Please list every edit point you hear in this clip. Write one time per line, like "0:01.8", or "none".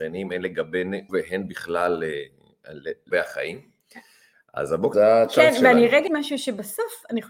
0:01.1
0:03.1
0:04.9
0:06.1

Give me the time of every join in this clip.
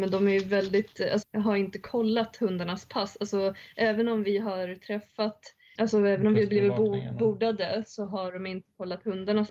0:01.2
0:05.8

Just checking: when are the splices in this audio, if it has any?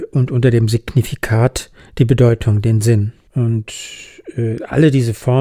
0:03.3

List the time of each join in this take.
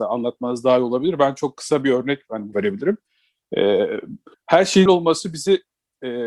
0:02.5
0:04.3
0:04.9

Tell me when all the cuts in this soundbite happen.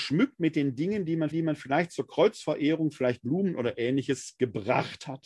0:01.3

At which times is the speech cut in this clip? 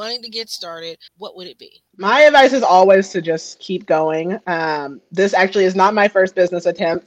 0:01.1
0:01.9

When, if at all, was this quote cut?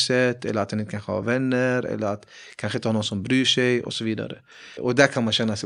none

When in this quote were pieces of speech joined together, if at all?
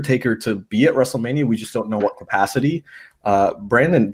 0:02.0

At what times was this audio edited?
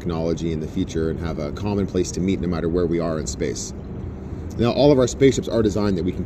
none

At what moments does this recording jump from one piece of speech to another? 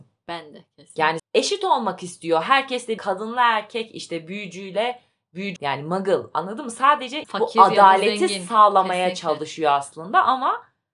0:01.2
0:03.0
0:05.6
0:07.2

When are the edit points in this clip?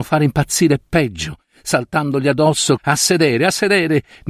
0:02.8

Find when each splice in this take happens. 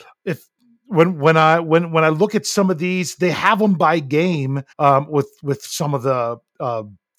0:04.7

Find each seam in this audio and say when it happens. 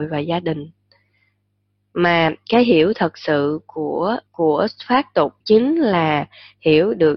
0:04.3
0:05.4

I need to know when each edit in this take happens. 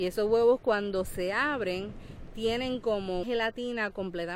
0:03.2

